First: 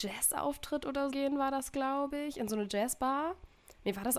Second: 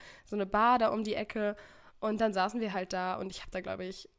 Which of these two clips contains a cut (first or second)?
first